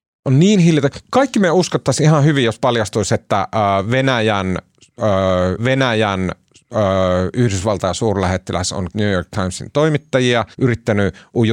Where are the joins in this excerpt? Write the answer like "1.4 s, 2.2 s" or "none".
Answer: 5.6 s, 8.9 s, 10.5 s